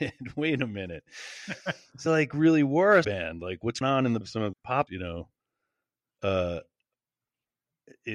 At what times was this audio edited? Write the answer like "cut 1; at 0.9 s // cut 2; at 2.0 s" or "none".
cut 1; at 2.1 s // cut 2; at 3.0 s // cut 3; at 3.8 s // cut 4; at 4.2 s // cut 5; at 4.5 s // cut 6; at 4.9 s